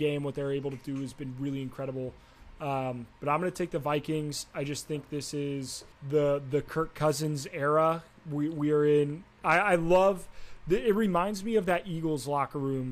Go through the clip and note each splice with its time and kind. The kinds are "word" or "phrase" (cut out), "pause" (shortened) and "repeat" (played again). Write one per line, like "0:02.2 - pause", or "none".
0:05.9 - pause